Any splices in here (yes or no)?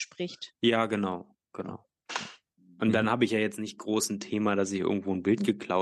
no